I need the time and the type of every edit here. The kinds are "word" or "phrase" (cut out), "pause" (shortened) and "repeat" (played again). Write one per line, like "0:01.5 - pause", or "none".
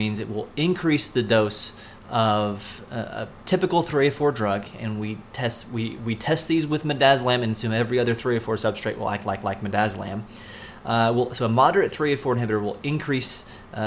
0:05.7 - word
0:09.4 - repeat